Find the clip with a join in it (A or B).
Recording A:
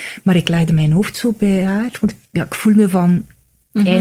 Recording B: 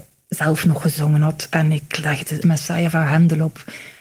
B